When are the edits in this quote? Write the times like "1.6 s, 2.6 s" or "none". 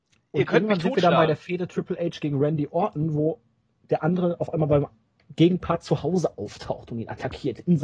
none